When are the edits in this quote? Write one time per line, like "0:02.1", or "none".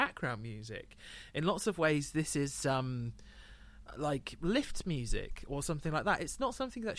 none